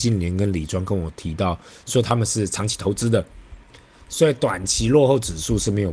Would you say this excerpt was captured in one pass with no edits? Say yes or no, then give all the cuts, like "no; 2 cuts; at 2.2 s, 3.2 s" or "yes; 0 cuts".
yes; 0 cuts